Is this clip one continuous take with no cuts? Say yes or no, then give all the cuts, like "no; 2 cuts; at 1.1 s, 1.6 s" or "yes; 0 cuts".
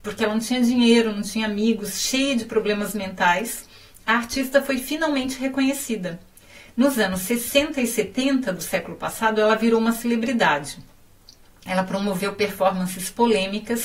yes; 0 cuts